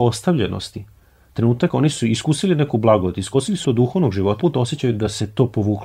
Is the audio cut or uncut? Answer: cut